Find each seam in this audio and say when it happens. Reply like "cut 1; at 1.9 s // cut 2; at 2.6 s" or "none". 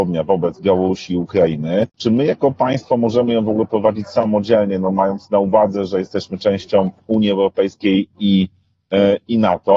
cut 1; at 1.9 s // cut 2; at 7.0 s